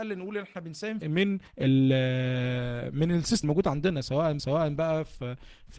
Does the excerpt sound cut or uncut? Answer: cut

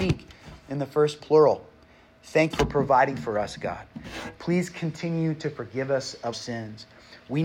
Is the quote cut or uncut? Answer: cut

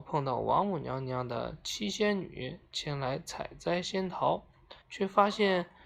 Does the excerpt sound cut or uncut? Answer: cut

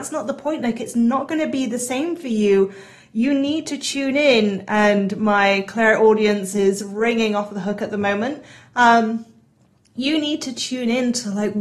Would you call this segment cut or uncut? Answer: uncut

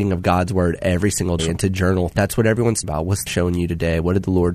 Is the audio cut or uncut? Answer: cut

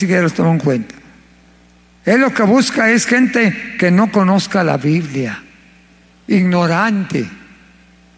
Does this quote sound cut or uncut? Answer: uncut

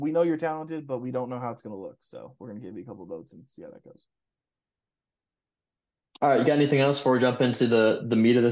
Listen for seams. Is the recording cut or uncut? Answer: uncut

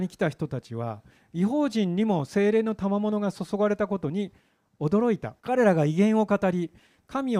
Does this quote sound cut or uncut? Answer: cut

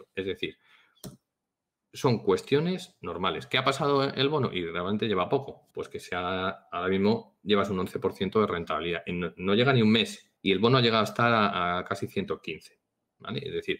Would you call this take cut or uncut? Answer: cut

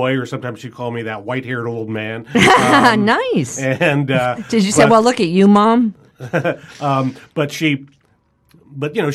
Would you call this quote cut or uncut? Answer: uncut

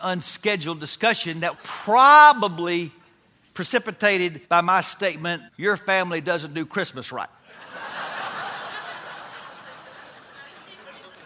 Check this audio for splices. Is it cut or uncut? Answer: cut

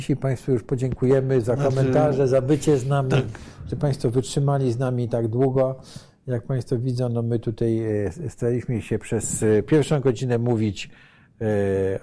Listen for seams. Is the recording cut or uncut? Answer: uncut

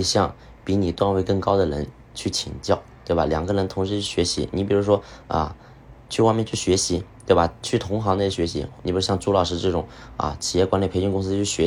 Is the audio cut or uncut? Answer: cut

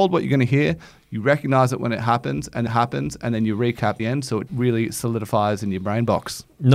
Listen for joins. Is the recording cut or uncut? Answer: cut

